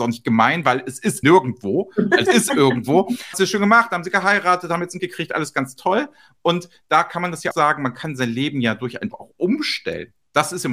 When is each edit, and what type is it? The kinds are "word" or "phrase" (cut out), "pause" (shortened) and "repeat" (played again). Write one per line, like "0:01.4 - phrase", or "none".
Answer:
0:01.2 - word
0:02.3 - word
0:03.3 - word
0:05.0 - word
0:07.5 - word
0:09.1 - word